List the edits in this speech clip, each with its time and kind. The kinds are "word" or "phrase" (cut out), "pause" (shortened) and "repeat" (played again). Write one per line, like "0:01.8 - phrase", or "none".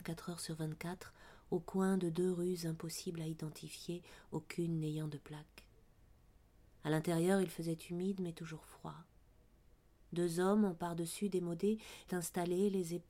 0:12.1 - word